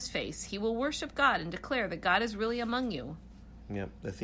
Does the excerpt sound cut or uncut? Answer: uncut